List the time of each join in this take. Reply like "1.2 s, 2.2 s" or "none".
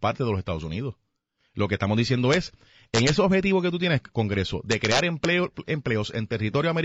none